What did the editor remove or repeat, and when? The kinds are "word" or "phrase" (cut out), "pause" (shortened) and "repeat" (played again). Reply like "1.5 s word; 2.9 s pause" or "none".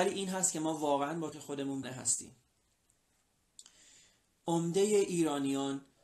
1.3 s word; 1.8 s word